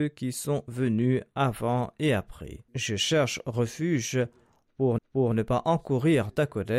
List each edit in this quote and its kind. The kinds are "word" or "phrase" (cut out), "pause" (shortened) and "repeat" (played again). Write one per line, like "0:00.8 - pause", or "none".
0:02.7 - pause
0:05.0 - repeat